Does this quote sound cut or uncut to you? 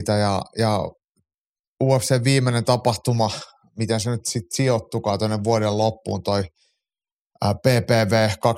uncut